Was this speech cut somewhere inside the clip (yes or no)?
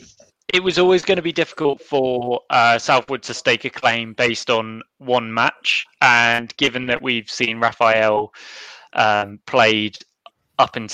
no